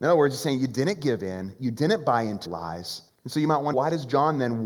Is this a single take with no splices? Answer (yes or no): no